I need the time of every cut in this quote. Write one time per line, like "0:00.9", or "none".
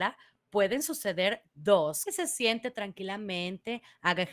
0:02.1